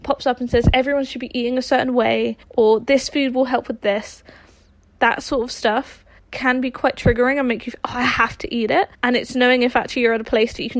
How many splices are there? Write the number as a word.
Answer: three